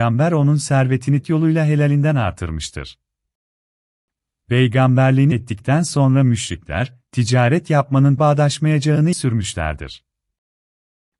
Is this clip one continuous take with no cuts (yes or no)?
no